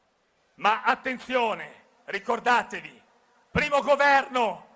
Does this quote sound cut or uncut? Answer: uncut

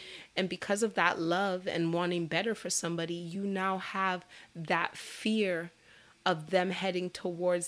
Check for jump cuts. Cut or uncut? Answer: uncut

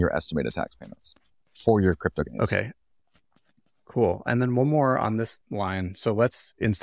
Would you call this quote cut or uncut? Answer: uncut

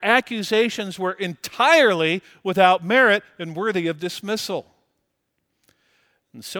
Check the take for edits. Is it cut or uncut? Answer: uncut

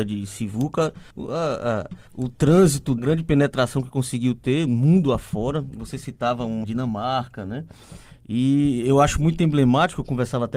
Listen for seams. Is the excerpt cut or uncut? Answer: cut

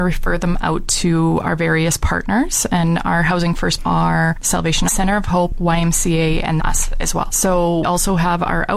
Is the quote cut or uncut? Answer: cut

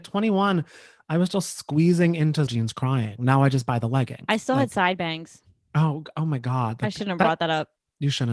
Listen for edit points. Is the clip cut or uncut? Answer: cut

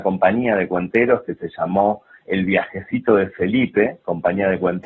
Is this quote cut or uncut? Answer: uncut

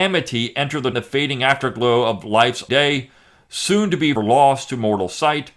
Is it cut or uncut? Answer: cut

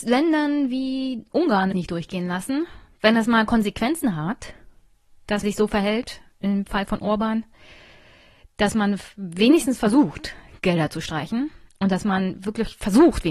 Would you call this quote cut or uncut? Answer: cut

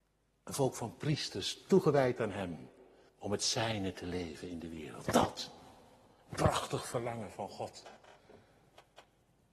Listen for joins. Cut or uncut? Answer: cut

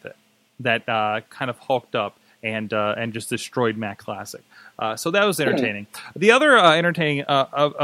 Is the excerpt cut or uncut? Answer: uncut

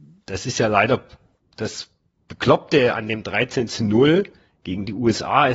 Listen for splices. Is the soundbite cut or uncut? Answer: uncut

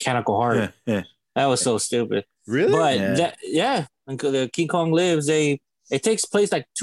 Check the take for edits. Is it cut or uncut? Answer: uncut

